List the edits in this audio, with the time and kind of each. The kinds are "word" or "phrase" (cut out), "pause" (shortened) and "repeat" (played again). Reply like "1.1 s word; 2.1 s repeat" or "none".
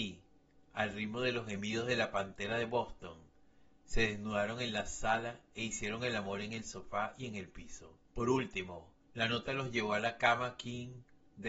8.0 s pause; 9.0 s pause